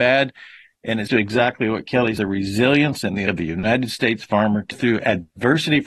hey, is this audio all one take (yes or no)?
no